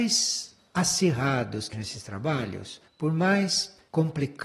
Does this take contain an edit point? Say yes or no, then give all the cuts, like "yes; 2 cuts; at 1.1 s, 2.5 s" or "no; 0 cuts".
yes; 2 cuts; at 1.7 s, 2.9 s